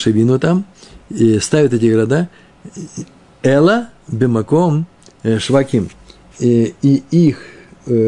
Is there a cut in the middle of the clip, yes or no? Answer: no